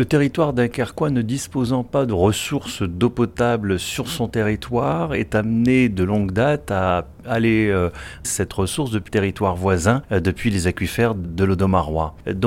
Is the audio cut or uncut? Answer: cut